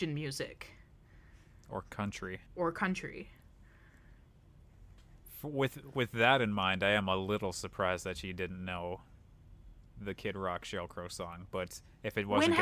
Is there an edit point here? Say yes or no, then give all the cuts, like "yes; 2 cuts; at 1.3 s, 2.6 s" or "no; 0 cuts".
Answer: yes; 1 cut; at 2.5 s